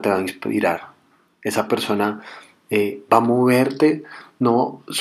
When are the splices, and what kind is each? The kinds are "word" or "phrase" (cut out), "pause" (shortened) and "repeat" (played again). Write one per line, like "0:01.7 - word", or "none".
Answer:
none